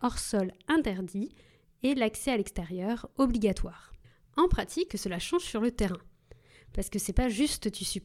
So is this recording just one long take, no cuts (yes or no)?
no